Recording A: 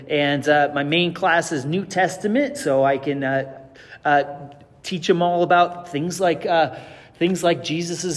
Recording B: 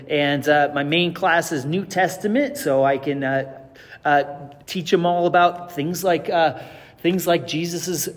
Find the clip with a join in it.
B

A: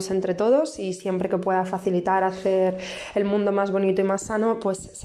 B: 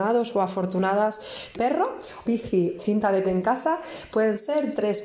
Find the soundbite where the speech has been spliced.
B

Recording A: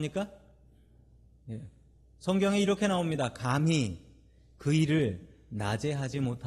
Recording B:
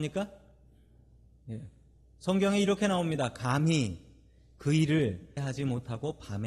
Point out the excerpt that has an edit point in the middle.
B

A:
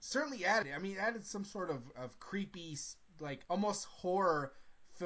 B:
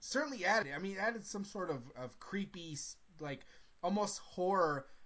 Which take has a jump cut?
A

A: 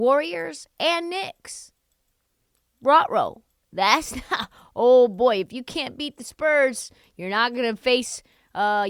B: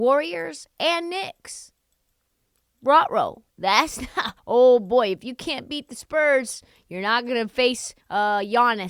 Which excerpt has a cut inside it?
B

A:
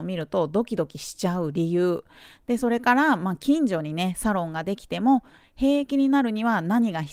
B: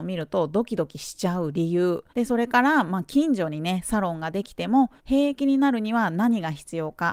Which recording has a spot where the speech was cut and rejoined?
B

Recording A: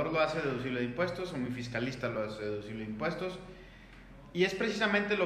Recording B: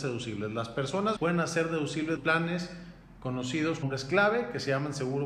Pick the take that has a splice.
B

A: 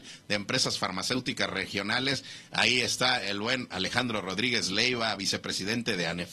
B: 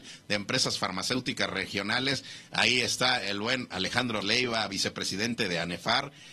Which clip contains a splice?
B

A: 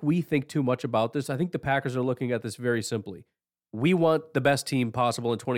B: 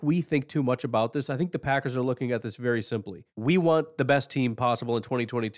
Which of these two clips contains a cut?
B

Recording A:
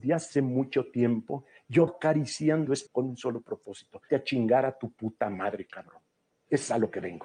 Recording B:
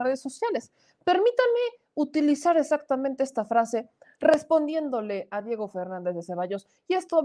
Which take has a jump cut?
A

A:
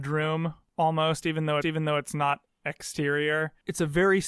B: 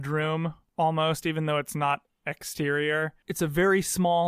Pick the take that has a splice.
A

